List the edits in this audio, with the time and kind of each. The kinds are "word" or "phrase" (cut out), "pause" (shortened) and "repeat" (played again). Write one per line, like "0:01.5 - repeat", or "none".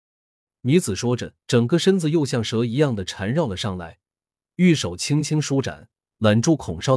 0:01.4 - pause